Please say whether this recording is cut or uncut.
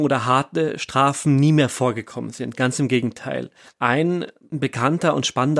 uncut